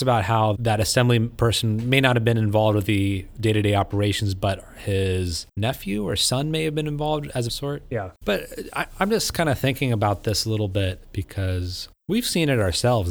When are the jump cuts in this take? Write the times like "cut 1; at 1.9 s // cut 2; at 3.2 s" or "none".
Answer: cut 1; at 5.5 s // cut 2; at 7.5 s // cut 3; at 8.2 s

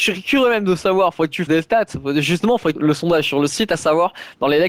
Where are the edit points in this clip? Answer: cut 1; at 1.5 s // cut 2; at 2.7 s

